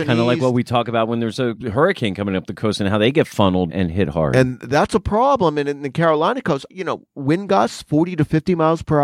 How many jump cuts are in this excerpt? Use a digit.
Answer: 3